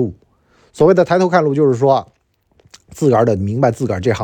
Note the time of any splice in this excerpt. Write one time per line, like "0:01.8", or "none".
none